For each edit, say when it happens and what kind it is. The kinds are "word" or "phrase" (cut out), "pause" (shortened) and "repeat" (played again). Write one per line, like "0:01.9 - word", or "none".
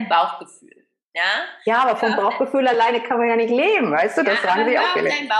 none